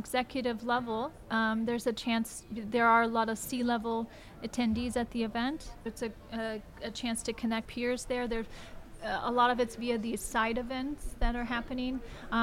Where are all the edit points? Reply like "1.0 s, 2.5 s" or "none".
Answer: 5.9 s, 7.6 s